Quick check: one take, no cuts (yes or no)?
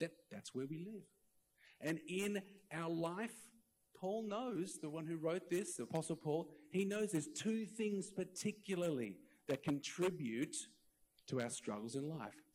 yes